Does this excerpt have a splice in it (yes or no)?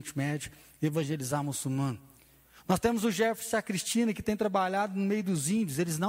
no